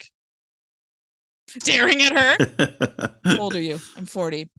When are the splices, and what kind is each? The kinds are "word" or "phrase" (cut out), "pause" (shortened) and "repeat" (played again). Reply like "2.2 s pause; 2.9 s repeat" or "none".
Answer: 1.6 s word